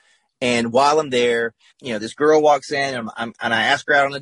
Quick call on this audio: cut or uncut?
cut